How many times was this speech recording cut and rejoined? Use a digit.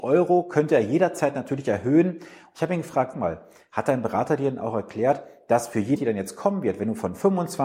2